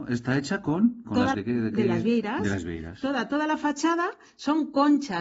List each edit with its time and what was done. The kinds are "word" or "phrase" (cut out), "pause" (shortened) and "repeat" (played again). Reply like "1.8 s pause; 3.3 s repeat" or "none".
1.3 s phrase